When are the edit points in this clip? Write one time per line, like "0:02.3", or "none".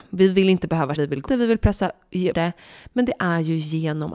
0:01.0
0:01.3
0:02.3